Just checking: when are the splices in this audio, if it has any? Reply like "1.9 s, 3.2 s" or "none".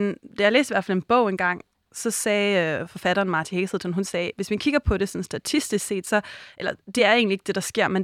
none